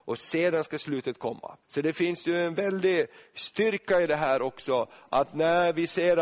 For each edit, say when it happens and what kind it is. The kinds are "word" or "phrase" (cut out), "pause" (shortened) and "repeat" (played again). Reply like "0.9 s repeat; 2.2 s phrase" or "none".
1.6 s pause